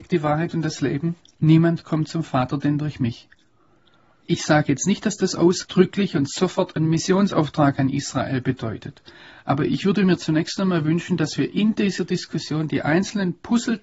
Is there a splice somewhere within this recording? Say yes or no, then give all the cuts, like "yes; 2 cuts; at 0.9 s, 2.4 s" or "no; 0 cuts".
no; 0 cuts